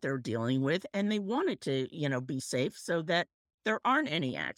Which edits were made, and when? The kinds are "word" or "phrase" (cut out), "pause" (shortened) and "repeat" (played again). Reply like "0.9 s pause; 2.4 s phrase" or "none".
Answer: none